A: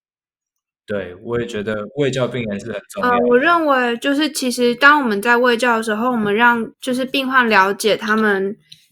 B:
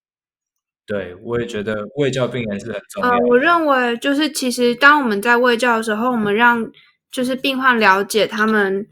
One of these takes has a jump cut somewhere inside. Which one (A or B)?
A